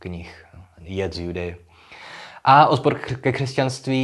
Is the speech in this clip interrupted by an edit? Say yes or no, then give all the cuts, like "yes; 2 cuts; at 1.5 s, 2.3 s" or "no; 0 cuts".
no; 0 cuts